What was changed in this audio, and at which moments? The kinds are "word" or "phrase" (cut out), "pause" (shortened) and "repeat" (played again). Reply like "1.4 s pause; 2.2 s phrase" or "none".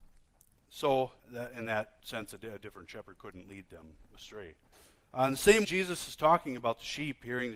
1.2 s pause; 4.7 s pause; 5.6 s word